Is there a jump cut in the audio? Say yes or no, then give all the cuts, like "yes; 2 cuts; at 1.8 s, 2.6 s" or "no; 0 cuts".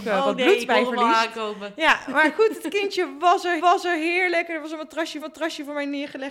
yes; 2 cuts; at 3.6 s, 5.2 s